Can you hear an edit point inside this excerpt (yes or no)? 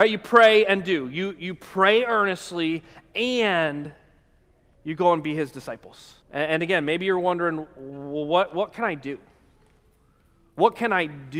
yes